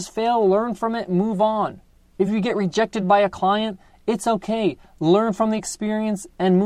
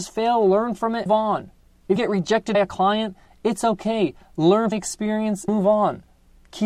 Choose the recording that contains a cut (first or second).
second